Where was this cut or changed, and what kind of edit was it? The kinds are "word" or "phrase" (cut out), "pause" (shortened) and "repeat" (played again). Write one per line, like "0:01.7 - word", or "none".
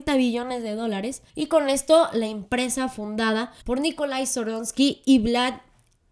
0:01.3 - pause
0:03.6 - pause